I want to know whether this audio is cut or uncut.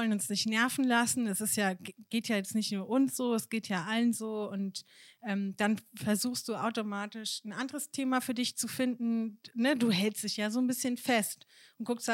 uncut